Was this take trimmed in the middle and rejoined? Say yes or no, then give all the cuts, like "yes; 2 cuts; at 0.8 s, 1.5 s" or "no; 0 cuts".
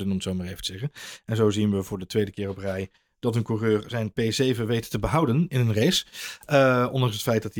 no; 0 cuts